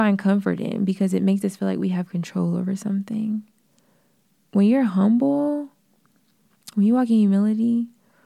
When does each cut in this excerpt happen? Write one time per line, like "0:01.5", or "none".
none